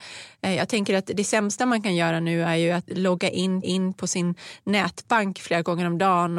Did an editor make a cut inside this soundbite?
yes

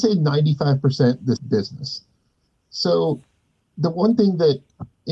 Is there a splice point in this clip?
yes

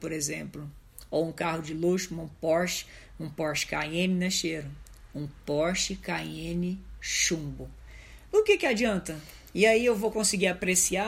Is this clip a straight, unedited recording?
yes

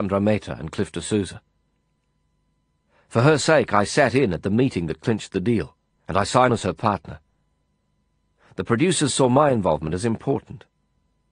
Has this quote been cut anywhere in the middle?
yes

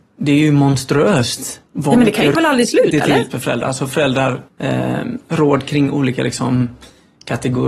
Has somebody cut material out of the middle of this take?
yes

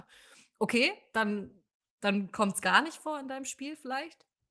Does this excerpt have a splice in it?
no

